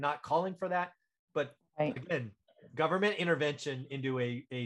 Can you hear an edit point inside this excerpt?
no; 0 cuts

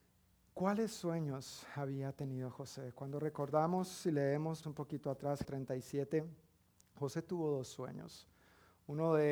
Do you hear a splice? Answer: yes; 2 cuts; at 4.6 s, 5.4 s

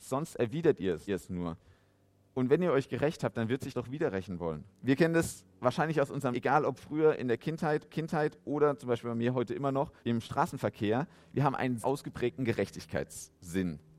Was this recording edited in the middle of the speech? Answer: yes; 8 cuts; at 1.1 s, 3.7 s, 4.7 s, 5.5 s, 6.3 s, 7.9 s, 10.0 s, 11.8 s

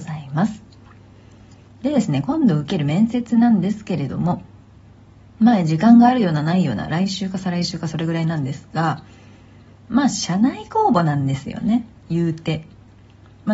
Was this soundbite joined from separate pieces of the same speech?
no; 0 cuts

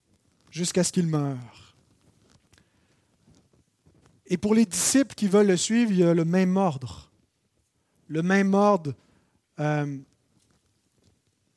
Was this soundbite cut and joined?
no; 0 cuts

